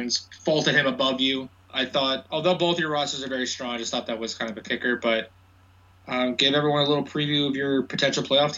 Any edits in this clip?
no; 0 cuts

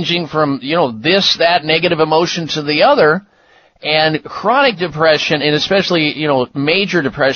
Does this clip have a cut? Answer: no; 0 cuts

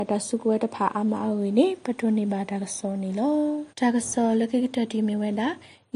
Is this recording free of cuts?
no; 1 cut; at 3.7 s

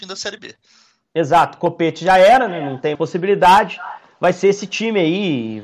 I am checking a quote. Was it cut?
yes; 1 cut; at 2.9 s

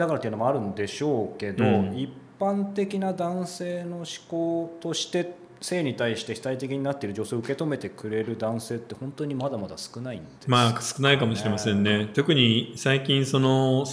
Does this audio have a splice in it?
yes; 1 cut; at 10.4 s

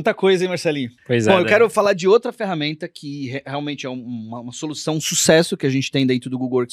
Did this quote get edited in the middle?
yes; 1 cut; at 1.0 s

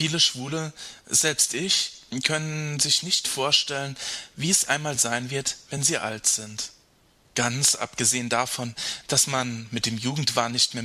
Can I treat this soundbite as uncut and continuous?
yes; 0 cuts

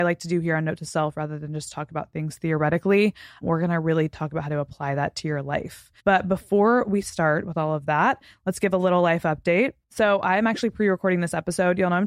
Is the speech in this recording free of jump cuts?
no; 2 cuts; at 6.0 s, 9.8 s

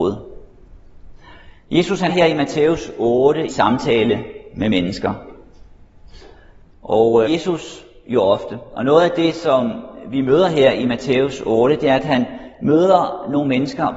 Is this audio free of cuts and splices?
no; 3 cuts; at 2.1 s, 3.5 s, 7.3 s

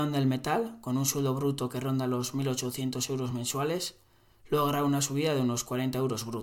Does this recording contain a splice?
no; 0 cuts

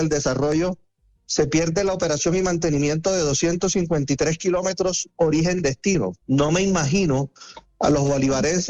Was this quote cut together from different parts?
yes; 1 cut; at 6.2 s

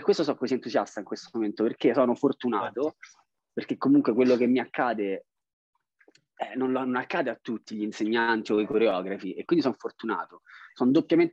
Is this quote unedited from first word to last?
yes; 0 cuts

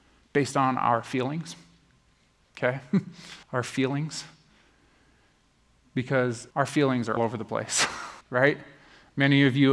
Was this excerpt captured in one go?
no; 4 cuts; at 3.4 s, 6.5 s, 7.2 s, 8.2 s

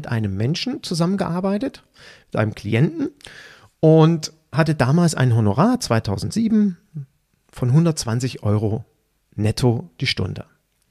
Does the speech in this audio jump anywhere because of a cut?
no; 0 cuts

